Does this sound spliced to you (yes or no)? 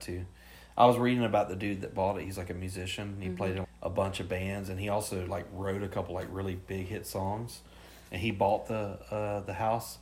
yes